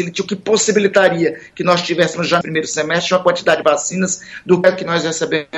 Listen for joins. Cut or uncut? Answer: cut